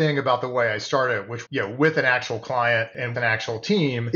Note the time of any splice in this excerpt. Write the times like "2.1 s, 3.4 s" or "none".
1.5 s, 3.1 s

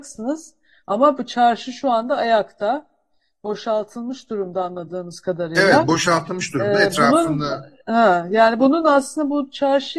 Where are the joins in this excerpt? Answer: none

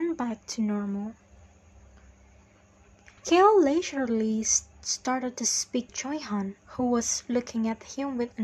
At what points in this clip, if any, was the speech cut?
3.2 s, 4.7 s, 5.9 s, 6.6 s

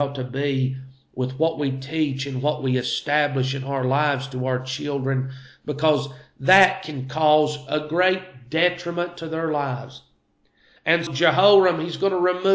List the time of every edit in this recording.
11.1 s

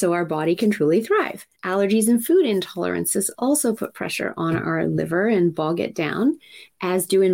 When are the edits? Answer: 1.6 s

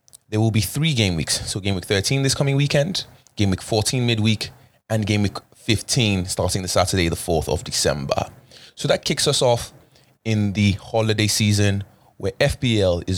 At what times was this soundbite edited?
none

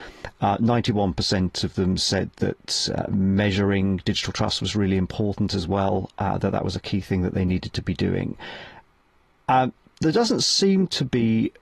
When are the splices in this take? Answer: none

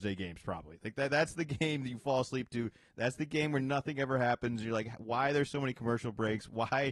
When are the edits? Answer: none

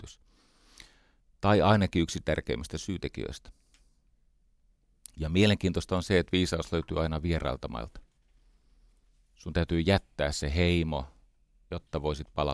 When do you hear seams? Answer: none

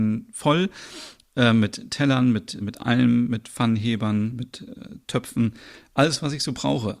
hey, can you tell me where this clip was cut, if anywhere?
2.6 s

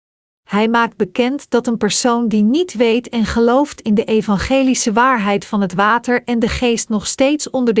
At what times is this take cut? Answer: none

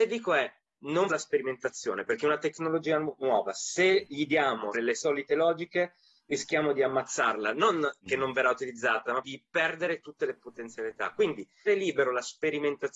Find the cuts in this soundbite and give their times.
1.1 s, 4.7 s, 9.2 s, 11.7 s

